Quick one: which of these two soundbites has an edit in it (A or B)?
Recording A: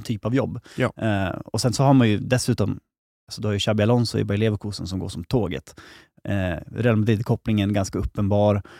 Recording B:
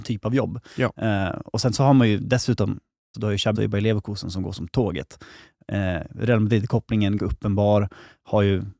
B